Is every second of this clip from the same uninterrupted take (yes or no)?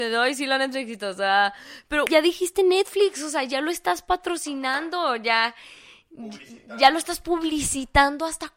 no